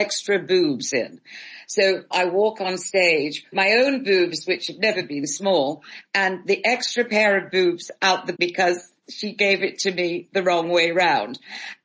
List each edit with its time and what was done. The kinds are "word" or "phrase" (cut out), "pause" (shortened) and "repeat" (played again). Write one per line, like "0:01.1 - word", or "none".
0:02.1 - word
0:03.5 - word
0:08.3 - word